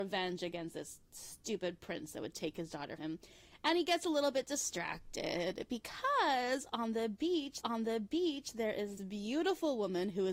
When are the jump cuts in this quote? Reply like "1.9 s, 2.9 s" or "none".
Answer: 3.0 s, 7.6 s, 9.0 s